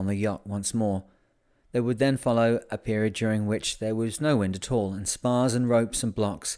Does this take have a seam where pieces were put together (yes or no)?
no